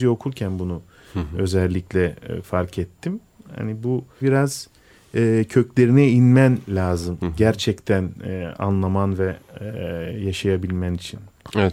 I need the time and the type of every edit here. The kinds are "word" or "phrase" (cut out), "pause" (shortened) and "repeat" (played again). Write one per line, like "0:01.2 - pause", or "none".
0:04.2 - phrase
0:07.2 - phrase